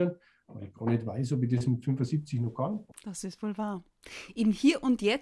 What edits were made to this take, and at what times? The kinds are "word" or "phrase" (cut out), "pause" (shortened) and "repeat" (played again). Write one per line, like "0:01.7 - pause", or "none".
0:02.9 - pause

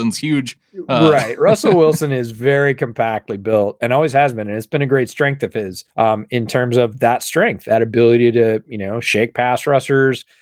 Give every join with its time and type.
0:05.9 - pause

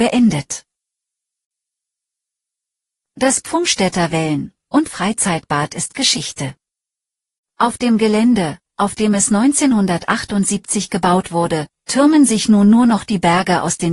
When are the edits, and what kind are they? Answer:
none

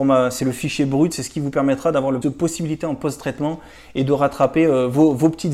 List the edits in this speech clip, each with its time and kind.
0:02.2 - word

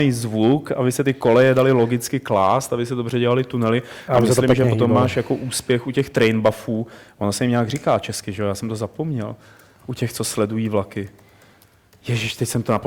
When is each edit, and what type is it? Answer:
none

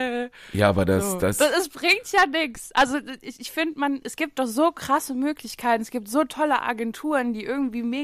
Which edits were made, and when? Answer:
none

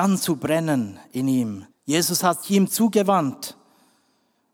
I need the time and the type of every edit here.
0:01.7 - pause
0:02.4 - word

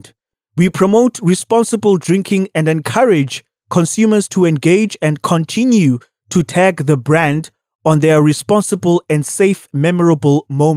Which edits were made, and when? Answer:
none

